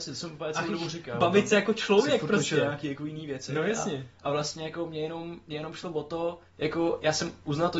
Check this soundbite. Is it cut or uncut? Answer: cut